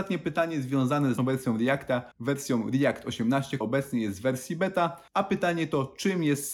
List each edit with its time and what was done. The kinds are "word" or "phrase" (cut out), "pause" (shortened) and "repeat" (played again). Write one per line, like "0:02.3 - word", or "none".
0:01.2 - word
0:02.1 - pause
0:03.6 - word
0:05.1 - pause